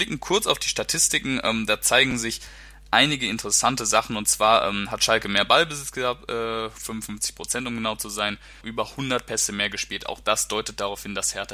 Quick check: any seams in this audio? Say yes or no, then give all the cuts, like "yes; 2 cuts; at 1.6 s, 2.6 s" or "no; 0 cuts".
yes; 1 cut; at 8.6 s